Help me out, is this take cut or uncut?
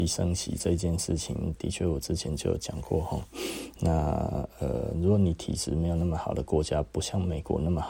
cut